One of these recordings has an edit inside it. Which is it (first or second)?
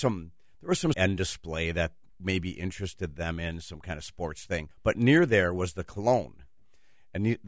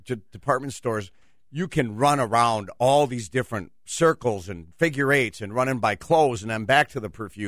first